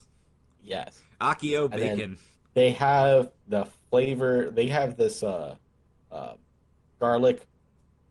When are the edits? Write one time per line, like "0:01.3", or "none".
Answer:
0:02.3
0:03.4
0:06.8